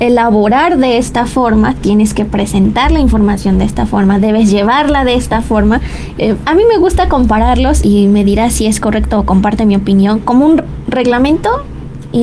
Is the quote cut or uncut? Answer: cut